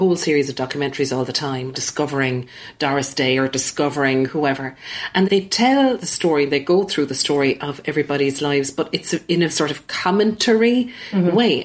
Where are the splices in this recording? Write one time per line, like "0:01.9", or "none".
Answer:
0:01.7
0:05.2
0:09.5

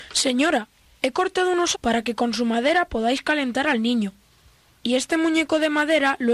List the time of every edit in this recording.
0:01.7

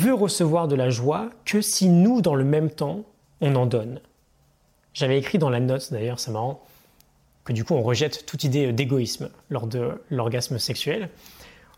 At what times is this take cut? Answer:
none

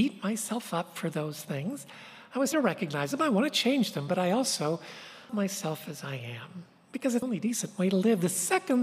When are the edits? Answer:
0:02.5
0:05.3
0:07.2

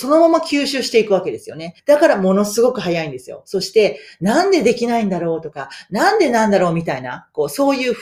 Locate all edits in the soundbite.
0:01.8

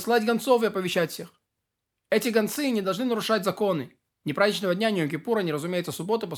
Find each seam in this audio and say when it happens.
none

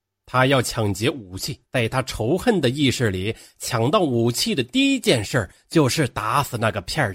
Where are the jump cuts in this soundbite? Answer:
0:01.7

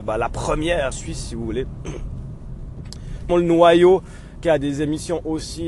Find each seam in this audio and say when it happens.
0:00.9
0:03.3
0:04.4

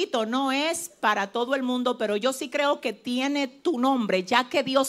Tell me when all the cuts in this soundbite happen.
none

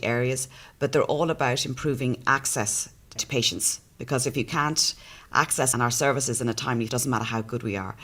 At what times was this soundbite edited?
0:03.2
0:05.7
0:06.9

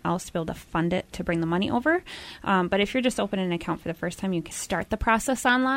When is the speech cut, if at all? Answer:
0:01.1
0:04.5

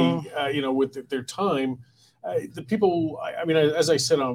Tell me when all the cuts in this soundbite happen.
none

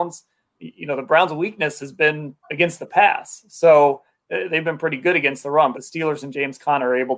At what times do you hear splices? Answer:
0:02.4
0:05.7

